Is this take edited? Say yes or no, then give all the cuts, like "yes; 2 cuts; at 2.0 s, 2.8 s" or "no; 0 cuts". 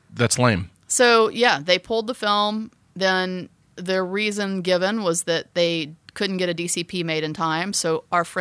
no; 0 cuts